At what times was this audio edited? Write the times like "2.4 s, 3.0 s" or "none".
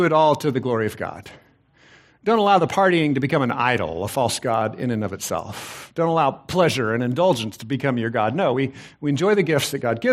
none